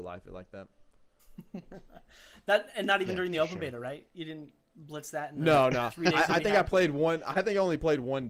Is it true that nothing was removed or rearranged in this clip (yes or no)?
yes